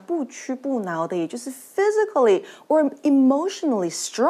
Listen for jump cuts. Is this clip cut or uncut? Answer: uncut